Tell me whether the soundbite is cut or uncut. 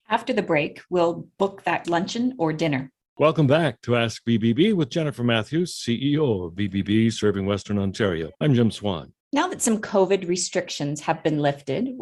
cut